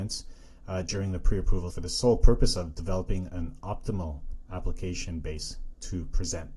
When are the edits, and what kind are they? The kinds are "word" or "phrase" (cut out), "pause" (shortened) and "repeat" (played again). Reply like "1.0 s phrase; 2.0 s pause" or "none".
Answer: 1.7 s word